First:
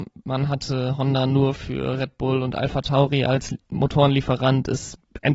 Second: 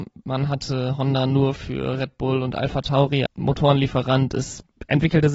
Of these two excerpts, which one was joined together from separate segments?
second; 1 cut; at 3.3 s

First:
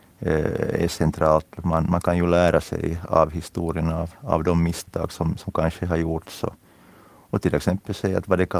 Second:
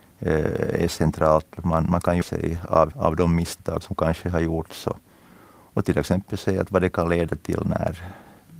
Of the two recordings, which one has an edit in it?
second; 3 cuts; at 2.2 s, 2.9 s, 3.8 s

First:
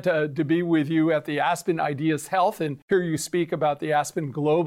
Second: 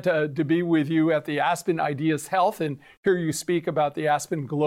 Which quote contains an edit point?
first; 1 cut; at 2.8 s

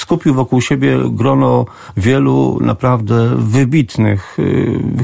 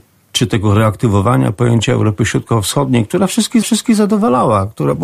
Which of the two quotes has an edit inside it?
second; 1 cut; at 3.6 s

